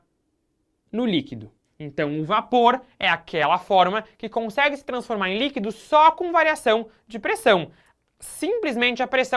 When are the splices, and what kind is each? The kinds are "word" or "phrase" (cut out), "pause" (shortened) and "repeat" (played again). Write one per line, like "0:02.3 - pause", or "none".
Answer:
none